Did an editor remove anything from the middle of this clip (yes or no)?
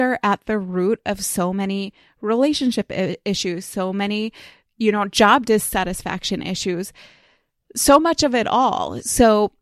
no